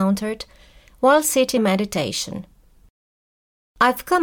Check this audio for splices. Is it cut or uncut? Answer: cut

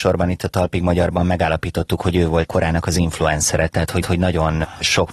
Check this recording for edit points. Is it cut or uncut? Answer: cut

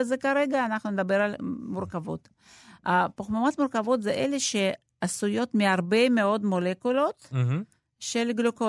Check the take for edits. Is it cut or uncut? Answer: cut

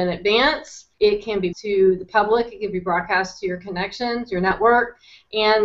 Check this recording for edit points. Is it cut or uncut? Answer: cut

